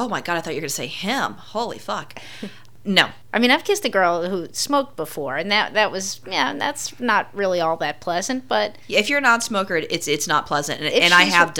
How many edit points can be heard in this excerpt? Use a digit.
0